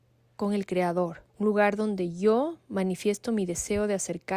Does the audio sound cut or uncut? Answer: cut